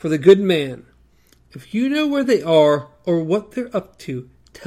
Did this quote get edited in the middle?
no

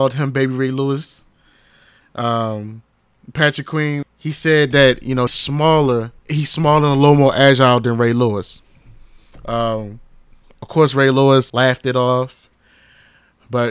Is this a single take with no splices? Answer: no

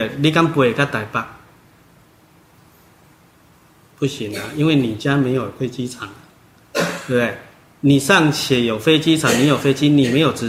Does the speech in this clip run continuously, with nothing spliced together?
yes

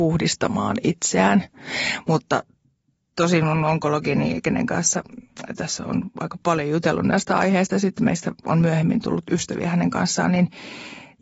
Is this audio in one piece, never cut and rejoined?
yes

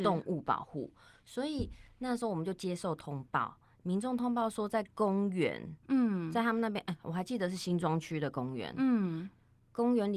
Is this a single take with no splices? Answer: yes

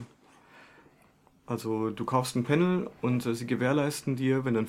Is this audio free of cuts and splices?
yes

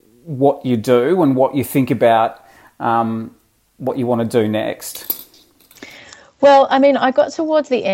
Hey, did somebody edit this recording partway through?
no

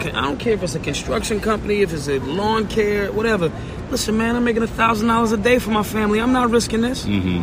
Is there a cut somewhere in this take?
no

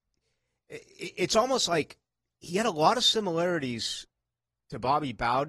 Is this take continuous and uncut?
yes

